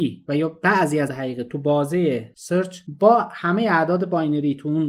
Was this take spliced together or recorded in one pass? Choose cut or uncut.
cut